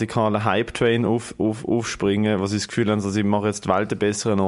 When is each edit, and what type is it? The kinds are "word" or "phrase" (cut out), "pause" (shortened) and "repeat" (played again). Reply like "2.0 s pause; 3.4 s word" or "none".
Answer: none